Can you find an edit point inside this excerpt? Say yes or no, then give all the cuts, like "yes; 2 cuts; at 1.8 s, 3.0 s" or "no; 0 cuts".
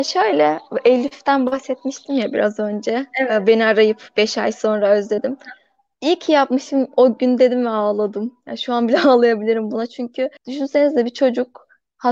yes; 1 cut; at 10.4 s